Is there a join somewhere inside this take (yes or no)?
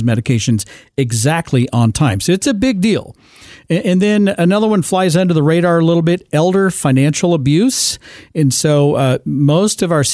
no